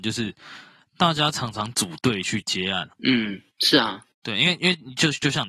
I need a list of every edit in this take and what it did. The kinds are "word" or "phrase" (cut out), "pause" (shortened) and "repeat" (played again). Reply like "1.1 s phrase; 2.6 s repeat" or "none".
2.9 s pause